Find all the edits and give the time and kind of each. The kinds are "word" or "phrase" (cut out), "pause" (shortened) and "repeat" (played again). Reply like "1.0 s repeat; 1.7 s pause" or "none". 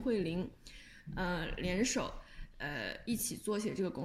none